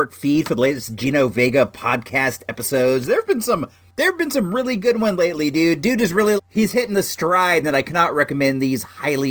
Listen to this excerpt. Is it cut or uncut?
cut